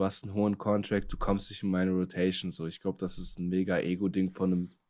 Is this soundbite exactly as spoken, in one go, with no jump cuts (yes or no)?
yes